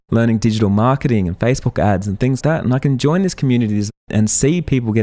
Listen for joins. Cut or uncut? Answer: cut